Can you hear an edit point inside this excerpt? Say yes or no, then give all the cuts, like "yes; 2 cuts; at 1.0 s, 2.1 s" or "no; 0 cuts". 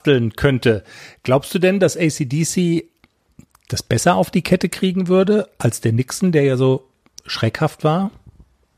no; 0 cuts